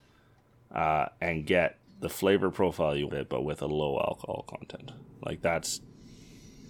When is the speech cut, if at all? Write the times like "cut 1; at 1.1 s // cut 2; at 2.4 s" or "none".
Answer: cut 1; at 1.8 s // cut 2; at 3.1 s